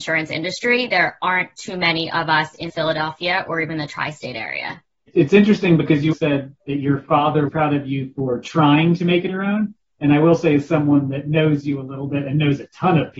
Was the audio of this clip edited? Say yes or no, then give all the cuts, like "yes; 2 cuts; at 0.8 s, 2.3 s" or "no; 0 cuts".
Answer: yes; 4 cuts; at 2.7 s, 6.1 s, 7.5 s, 9.3 s